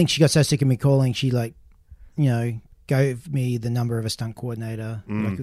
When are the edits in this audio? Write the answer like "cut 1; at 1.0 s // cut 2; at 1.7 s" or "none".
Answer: none